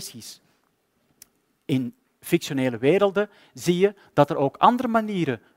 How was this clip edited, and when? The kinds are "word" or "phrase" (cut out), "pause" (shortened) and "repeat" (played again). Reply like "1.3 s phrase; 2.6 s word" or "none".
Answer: none